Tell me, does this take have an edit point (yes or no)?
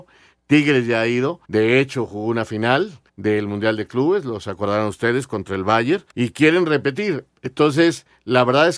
yes